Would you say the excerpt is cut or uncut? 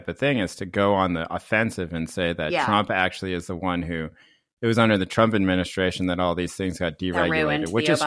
uncut